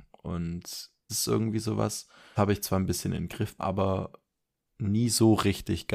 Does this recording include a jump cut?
yes; 3 cuts; at 1.1 s, 2.4 s, 3.6 s

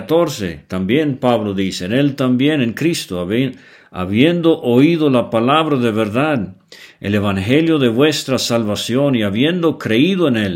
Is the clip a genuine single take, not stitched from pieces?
yes; 0 cuts

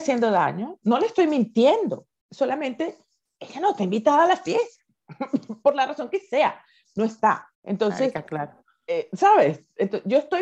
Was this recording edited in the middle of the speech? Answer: yes; 1 cut; at 7.5 s

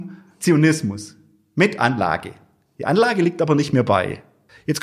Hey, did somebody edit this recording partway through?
no; 0 cuts

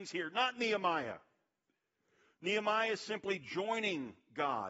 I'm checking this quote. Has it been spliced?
no; 0 cuts

